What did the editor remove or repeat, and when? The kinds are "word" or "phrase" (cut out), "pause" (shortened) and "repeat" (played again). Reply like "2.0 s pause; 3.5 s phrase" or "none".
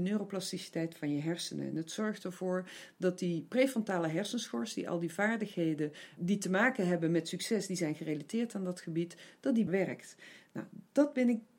6.2 s word; 9.7 s word